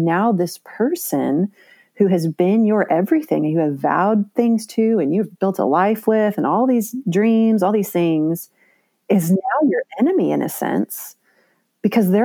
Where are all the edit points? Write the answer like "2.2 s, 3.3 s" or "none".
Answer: none